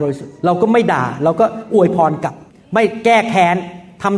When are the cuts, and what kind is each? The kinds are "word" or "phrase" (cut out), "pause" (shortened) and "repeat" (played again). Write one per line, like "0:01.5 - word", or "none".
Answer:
0:02.5 - pause